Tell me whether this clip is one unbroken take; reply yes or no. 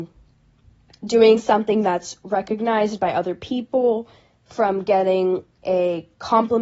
yes